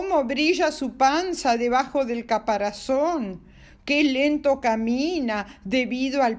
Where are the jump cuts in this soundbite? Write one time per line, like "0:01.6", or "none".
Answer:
none